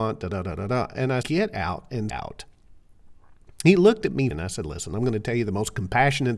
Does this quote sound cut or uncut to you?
cut